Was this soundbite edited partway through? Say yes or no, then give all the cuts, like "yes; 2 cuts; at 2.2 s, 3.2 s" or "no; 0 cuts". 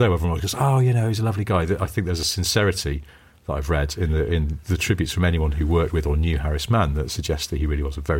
no; 0 cuts